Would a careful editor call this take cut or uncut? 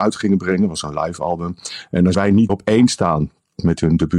cut